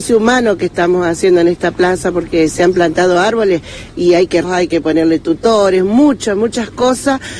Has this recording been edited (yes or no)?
yes